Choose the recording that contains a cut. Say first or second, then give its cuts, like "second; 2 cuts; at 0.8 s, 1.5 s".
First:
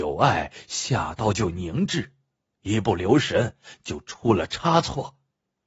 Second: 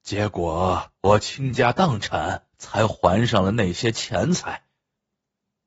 second; 2 cuts; at 1.0 s, 2.5 s